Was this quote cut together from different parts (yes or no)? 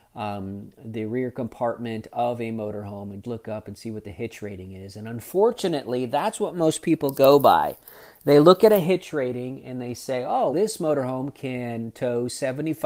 yes